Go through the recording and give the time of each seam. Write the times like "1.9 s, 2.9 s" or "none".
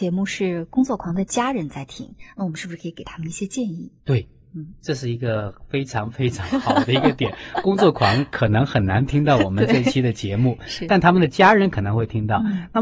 4.0 s